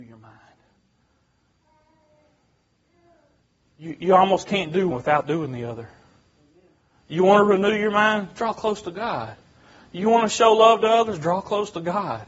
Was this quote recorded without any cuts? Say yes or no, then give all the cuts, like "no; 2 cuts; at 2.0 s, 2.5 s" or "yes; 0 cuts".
no; 1 cut; at 4.9 s